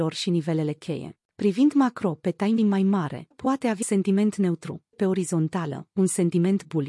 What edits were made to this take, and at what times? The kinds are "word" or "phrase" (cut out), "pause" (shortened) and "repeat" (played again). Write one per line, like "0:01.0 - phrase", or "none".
0:01.3 - pause
0:02.6 - word
0:03.3 - word
0:03.8 - word
0:04.9 - word